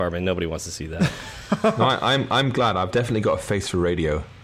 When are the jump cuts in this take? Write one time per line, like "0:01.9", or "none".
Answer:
none